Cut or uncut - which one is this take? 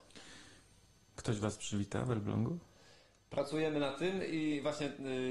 uncut